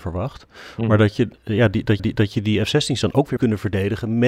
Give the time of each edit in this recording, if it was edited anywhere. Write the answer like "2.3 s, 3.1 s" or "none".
2.0 s, 3.4 s